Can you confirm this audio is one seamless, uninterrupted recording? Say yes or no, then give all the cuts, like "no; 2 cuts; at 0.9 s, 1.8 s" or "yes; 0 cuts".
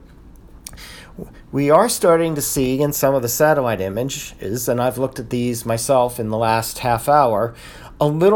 yes; 0 cuts